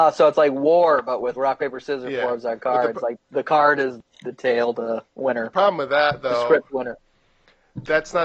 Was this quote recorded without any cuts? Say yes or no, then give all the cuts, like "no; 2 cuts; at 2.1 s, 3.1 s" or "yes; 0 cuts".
no; 1 cut; at 1.3 s